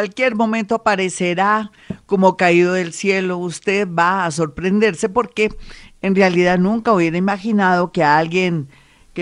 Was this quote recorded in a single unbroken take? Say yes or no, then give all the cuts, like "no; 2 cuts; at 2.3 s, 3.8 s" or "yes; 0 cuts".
yes; 0 cuts